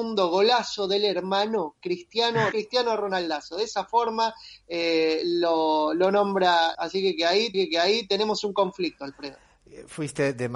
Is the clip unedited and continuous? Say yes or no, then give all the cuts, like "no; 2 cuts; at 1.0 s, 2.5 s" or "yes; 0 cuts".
no; 3 cuts; at 2.5 s, 6.7 s, 7.5 s